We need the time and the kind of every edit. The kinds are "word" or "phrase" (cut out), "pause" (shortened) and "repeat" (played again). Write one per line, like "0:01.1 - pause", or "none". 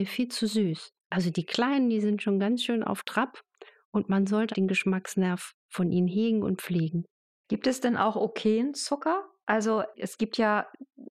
0:04.5 - word